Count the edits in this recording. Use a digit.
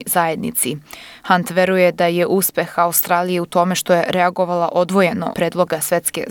1